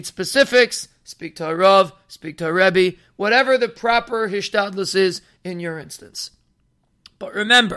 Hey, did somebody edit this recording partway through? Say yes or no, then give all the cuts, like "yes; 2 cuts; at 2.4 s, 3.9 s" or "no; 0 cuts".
no; 0 cuts